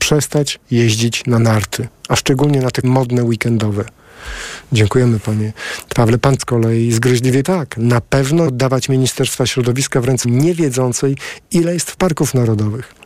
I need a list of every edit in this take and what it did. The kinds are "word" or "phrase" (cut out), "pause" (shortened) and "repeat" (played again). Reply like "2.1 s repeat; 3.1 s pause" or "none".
2.8 s word; 6.4 s word; 7.4 s word; 8.5 s word; 10.2 s word; 12.0 s word